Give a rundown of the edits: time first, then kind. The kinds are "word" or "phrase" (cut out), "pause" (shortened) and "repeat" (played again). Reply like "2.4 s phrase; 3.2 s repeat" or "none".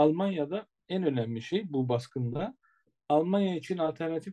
none